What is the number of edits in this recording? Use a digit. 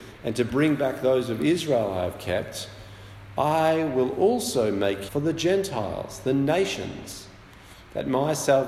1